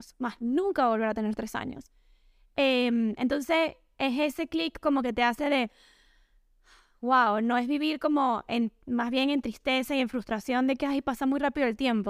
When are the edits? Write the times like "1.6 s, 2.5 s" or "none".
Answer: none